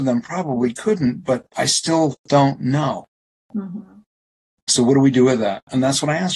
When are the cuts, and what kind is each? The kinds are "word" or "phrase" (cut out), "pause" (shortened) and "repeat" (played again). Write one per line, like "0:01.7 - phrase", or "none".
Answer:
none